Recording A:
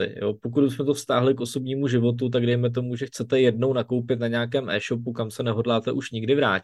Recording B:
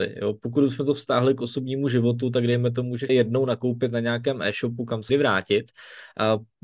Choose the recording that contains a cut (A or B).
B